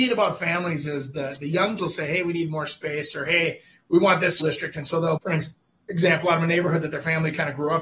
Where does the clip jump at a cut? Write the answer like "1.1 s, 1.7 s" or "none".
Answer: 1.8 s, 4.4 s, 5.2 s